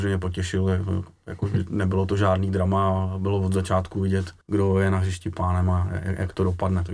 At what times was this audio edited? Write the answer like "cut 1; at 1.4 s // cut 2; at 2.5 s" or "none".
cut 1; at 4.4 s